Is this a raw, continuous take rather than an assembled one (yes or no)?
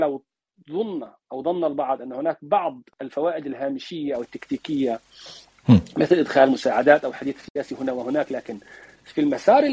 yes